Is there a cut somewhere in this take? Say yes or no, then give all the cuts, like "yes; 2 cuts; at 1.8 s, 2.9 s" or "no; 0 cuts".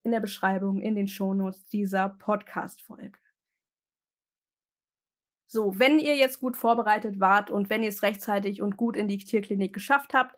no; 0 cuts